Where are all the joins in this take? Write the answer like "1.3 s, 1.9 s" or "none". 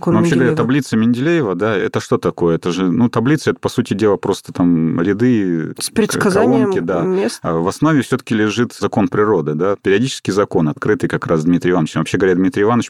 none

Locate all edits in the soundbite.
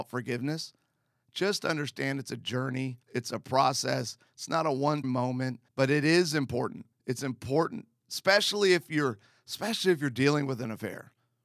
3.0 s, 5.0 s, 5.7 s, 6.9 s

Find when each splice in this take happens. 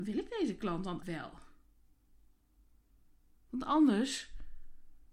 1.0 s

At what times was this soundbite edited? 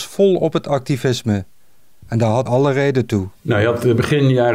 2.5 s

